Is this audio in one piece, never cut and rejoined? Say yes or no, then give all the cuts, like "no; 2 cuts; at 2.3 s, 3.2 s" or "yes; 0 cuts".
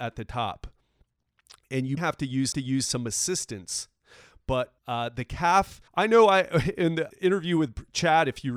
no; 5 cuts; at 2.0 s, 2.5 s, 4.8 s, 5.9 s, 7.1 s